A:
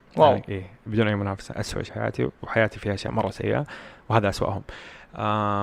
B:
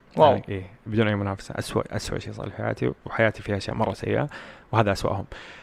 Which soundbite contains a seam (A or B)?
A